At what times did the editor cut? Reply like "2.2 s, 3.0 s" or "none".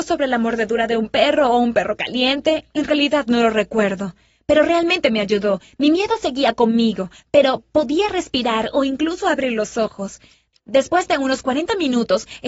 none

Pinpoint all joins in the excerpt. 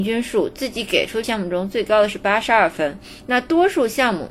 1.2 s

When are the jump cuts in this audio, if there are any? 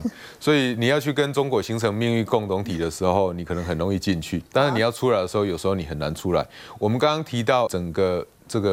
4.5 s, 7.7 s

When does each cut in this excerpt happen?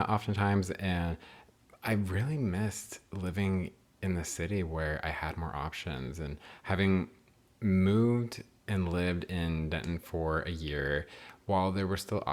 none

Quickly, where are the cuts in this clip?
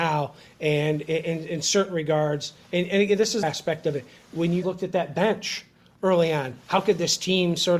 3.4 s, 4.6 s

